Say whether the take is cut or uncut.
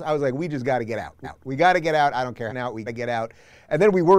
cut